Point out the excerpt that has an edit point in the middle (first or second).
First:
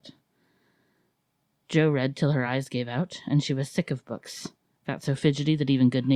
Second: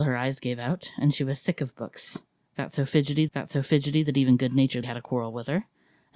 second